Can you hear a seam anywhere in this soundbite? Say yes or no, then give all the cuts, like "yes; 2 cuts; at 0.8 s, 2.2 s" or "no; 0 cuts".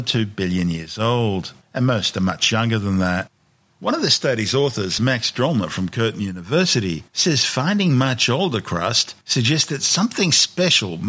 no; 0 cuts